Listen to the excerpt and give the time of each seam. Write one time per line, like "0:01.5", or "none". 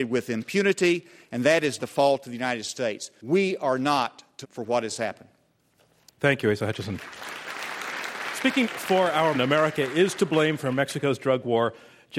0:01.8
0:04.4
0:08.6
0:09.3